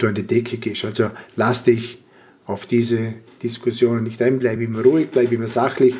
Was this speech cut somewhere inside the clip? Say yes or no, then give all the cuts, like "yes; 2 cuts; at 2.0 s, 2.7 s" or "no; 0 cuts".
no; 0 cuts